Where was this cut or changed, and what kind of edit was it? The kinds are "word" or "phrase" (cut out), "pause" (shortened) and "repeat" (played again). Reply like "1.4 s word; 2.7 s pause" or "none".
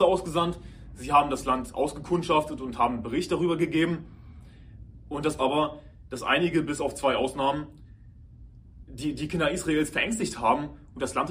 5.4 s phrase